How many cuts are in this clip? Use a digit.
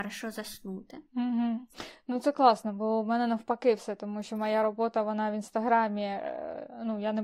1